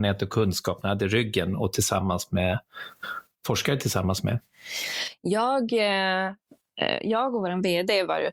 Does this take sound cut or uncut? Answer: uncut